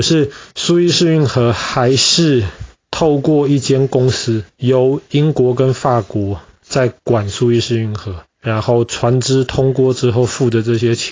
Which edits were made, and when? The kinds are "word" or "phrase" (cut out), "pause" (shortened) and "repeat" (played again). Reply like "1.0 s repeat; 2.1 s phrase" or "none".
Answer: 4.5 s pause; 8.3 s pause